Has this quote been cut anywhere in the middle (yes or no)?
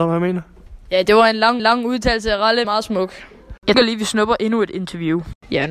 yes